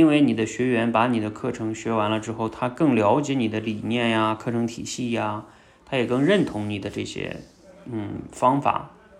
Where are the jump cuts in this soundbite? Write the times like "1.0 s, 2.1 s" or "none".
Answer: none